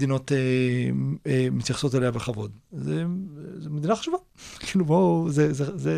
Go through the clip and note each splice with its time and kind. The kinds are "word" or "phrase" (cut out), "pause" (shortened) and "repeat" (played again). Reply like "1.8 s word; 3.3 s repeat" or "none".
none